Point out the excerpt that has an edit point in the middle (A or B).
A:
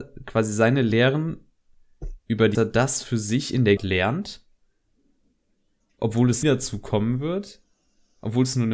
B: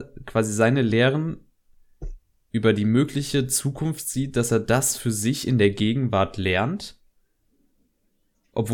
A